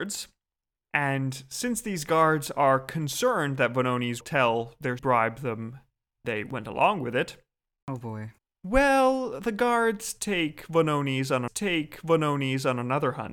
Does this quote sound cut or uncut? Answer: cut